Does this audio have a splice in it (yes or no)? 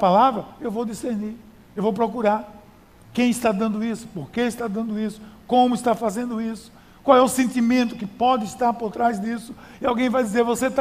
no